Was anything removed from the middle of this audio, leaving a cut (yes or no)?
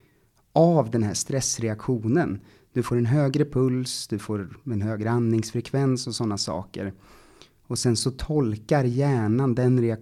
no